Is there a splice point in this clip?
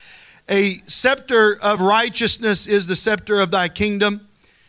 no; 0 cuts

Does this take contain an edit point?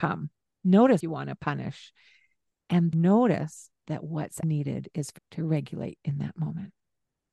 yes; 5 cuts; at 1.0 s, 2.9 s, 4.4 s, 5.2 s, 6.0 s

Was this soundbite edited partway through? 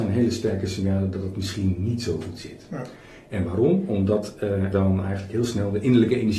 yes; 1 cut; at 4.7 s

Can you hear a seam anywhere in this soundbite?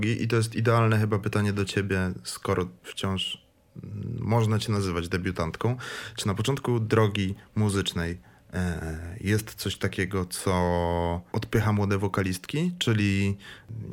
yes; 2 cuts; at 2.8 s, 11.3 s

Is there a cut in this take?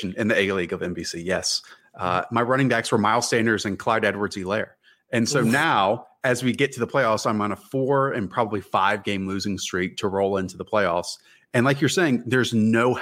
no; 0 cuts

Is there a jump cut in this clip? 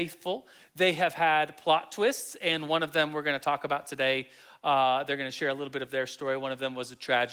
no; 0 cuts

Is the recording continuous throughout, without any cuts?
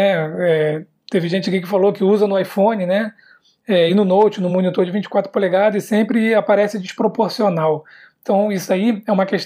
yes; 0 cuts

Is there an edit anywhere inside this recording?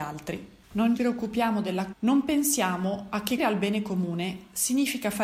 yes; 3 cuts; at 1.0 s, 1.9 s, 3.4 s

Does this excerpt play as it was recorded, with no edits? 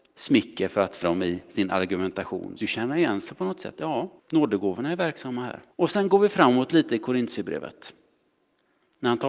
no; 4 cuts; at 1.0 s, 2.6 s, 4.2 s, 5.7 s

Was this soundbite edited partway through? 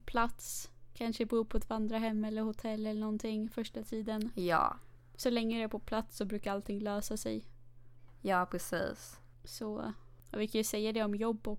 yes; 1 cut; at 9.4 s

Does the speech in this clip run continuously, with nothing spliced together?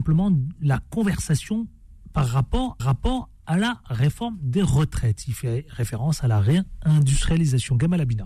no; 1 cut; at 2.8 s

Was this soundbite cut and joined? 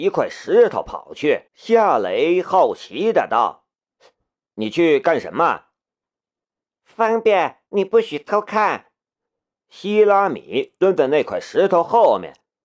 yes; 2 cuts; at 1.5 s, 7.7 s

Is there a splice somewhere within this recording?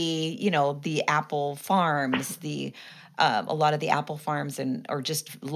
no; 0 cuts

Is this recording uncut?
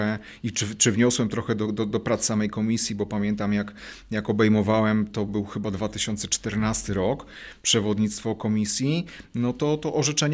yes; 0 cuts

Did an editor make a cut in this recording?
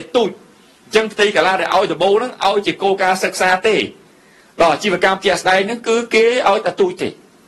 no; 0 cuts

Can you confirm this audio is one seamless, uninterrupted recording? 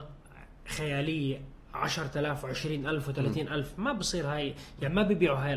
yes; 0 cuts

